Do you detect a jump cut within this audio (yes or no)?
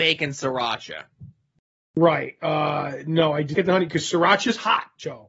yes